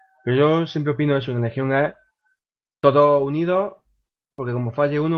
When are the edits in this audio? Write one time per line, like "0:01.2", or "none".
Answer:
none